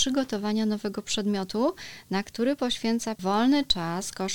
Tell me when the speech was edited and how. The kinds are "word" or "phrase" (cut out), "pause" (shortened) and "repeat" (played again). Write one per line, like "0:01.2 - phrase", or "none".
0:03.2 - word